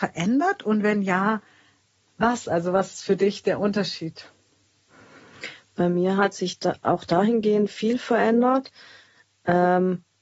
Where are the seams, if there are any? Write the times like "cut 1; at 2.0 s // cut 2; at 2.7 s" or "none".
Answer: none